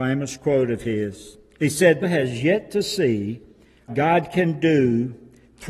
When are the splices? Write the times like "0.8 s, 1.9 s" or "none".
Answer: 2.0 s, 3.9 s

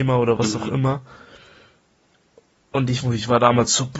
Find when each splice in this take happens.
3.0 s

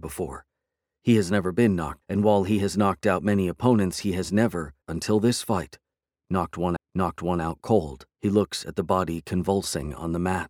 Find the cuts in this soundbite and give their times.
2.0 s, 4.8 s, 6.8 s, 8.1 s

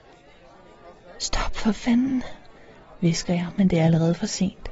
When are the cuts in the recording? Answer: none

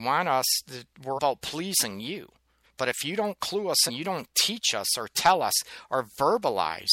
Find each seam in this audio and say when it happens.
1.2 s, 2.6 s, 3.9 s

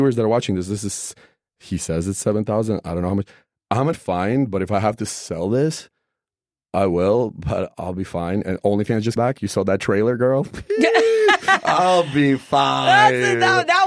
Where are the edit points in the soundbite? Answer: 3.9 s, 9.2 s

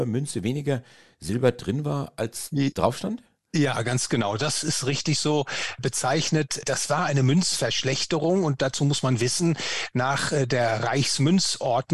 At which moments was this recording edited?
none

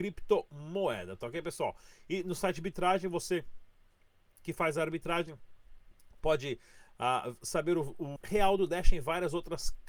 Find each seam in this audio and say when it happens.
8.2 s

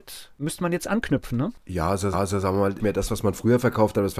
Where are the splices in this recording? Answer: 1.6 s, 2.1 s, 2.8 s

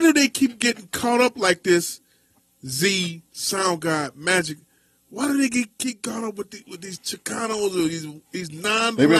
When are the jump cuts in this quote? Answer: none

